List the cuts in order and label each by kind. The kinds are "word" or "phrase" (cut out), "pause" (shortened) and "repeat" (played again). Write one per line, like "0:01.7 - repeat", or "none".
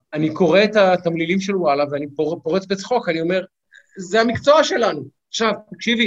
none